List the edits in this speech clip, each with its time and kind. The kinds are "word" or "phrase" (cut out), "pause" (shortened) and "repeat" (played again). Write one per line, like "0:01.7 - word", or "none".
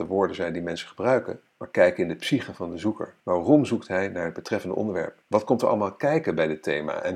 0:01.5 - pause
0:03.2 - pause
0:05.2 - pause

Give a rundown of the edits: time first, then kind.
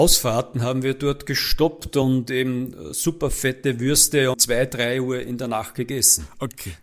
0:04.3 - word

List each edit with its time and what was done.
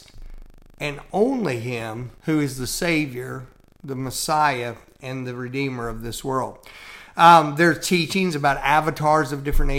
0:02.2 - pause

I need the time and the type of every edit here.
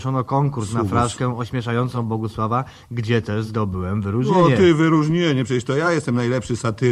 none

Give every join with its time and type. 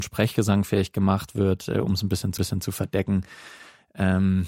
0:02.4 - repeat

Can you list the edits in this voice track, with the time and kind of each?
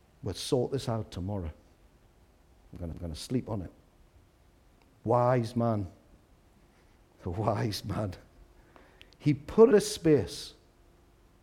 0:02.1 - pause
0:02.9 - repeat
0:09.7 - word

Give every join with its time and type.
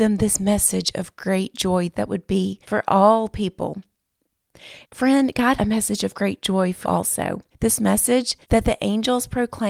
0:02.6 - pause
0:04.8 - pause
0:05.6 - word
0:06.8 - word
0:07.5 - pause
0:08.4 - pause

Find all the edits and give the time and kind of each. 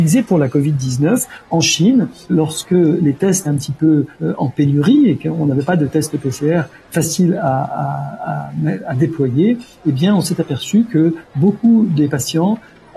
0:02.3 - word
0:03.4 - word
0:04.1 - pause

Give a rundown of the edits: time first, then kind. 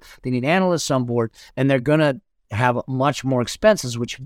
none

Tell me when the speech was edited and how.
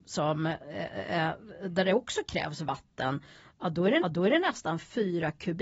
0:04.0 - repeat

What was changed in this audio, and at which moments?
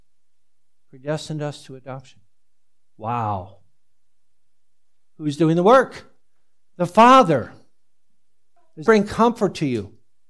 0:08.9 - word

